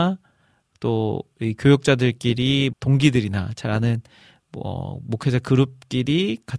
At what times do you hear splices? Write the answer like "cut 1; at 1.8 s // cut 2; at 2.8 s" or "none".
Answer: cut 1; at 2.7 s